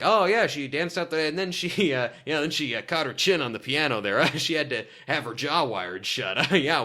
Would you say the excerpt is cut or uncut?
uncut